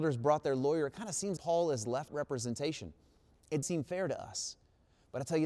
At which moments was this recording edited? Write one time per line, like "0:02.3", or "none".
0:01.4
0:02.1
0:03.6